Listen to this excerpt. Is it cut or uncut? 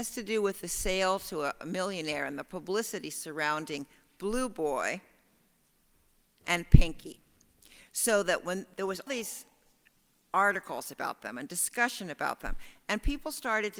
cut